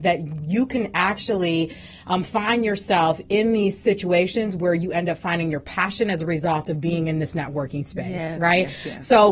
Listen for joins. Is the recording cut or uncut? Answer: uncut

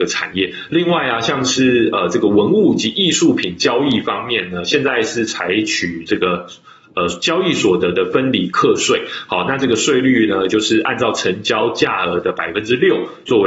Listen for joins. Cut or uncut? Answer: uncut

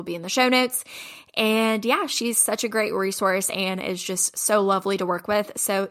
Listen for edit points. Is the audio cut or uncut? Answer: uncut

